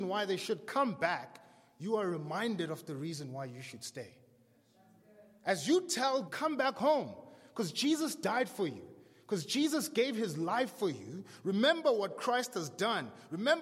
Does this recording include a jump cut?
yes; 1 cut; at 6.3 s

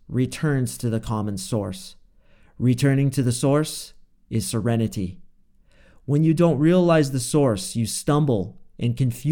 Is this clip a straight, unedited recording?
yes; 0 cuts

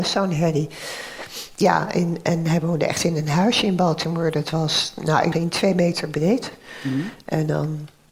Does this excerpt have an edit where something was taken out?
yes; 1 cut; at 5.3 s

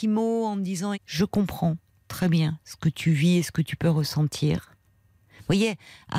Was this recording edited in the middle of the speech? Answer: yes; 1 cut; at 0.9 s

